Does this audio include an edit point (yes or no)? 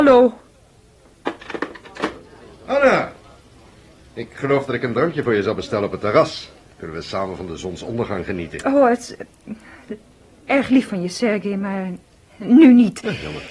no